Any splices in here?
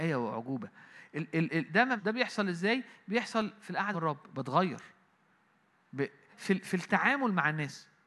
yes; 3 cuts; at 2.0 s, 3.9 s, 6.3 s

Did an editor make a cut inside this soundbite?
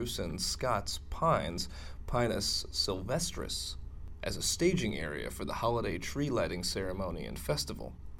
no; 0 cuts

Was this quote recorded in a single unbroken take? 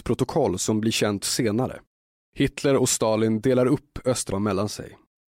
no; 2 cuts; at 1.2 s, 4.3 s

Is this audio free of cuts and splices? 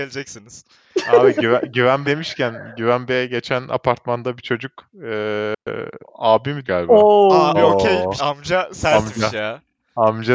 no; 5 cuts; at 2.0 s, 6.0 s, 6.6 s, 7.5 s, 8.2 s

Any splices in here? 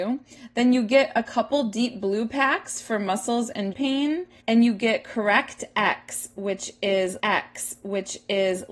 yes; 3 cuts; at 3.7 s, 4.4 s, 7.2 s

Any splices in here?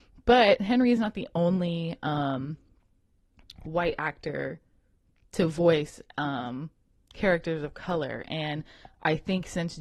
no; 0 cuts

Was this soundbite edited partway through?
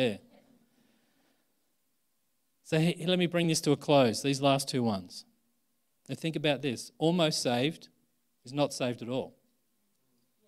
no; 0 cuts

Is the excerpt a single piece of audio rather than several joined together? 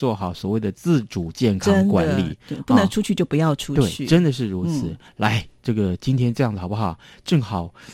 yes; 0 cuts

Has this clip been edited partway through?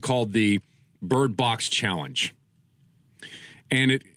no; 0 cuts

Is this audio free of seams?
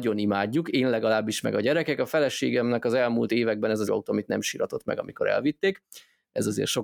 no; 1 cut; at 3.9 s

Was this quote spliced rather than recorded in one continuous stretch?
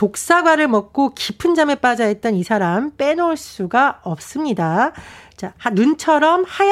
no; 0 cuts

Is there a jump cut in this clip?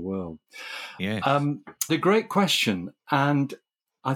yes; 1 cut; at 1.9 s

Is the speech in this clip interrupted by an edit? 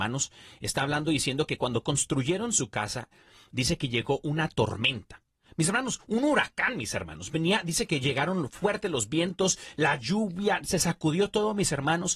no; 0 cuts

